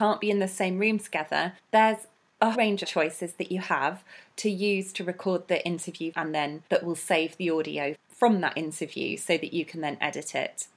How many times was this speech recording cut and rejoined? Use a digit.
6